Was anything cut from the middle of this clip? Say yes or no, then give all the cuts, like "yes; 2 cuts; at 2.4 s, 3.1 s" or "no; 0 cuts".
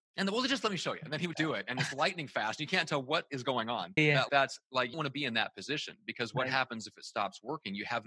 yes; 4 cuts; at 1.3 s, 4.0 s, 4.3 s, 4.9 s